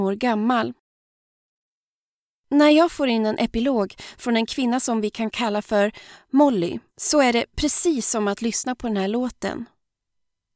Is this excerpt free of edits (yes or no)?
no